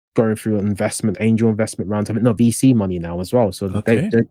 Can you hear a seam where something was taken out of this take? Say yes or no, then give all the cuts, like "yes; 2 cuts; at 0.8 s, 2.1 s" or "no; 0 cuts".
yes; 2 cuts; at 1.1 s, 2.4 s